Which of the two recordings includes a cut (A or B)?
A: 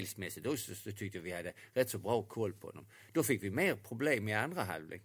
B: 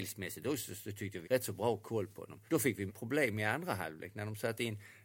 B